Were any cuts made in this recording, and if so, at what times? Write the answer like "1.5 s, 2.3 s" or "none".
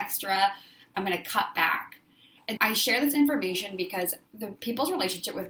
2.6 s, 4.3 s